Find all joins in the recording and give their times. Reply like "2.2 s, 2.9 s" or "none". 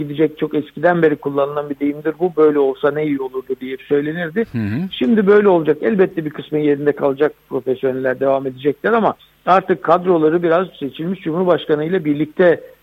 9.2 s